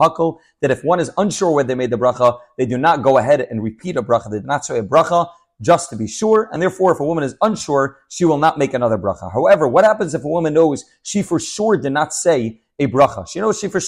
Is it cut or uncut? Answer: uncut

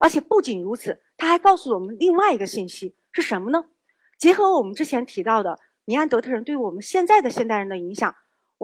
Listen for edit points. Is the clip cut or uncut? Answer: uncut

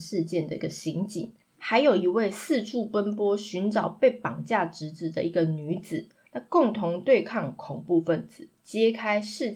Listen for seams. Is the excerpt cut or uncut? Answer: uncut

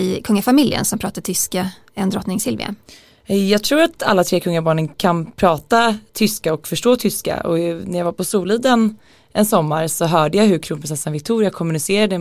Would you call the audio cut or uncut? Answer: uncut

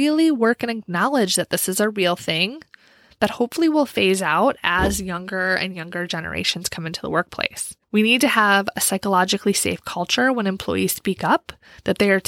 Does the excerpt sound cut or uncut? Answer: cut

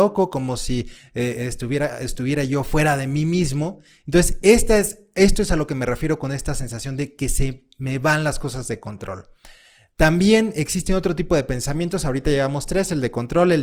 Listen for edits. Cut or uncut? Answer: uncut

